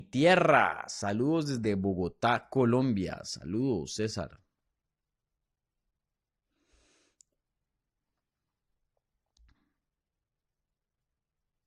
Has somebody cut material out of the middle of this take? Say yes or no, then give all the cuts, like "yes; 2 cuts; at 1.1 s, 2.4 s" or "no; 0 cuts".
no; 0 cuts